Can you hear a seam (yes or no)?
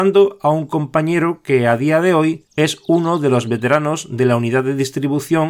yes